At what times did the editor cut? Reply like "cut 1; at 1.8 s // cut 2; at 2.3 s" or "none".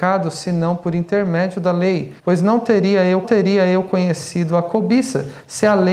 cut 1; at 2.2 s // cut 2; at 3.2 s